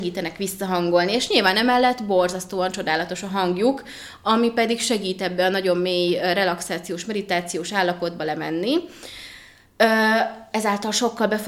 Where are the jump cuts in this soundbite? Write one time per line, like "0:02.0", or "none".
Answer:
none